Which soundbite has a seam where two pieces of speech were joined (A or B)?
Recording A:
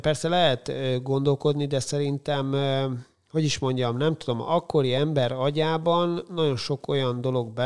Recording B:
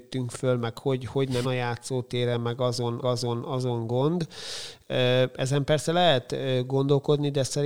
B